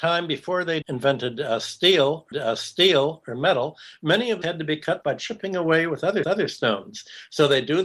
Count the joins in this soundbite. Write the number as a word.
four